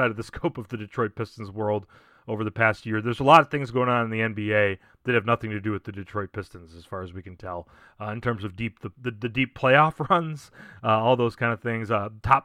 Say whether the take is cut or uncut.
uncut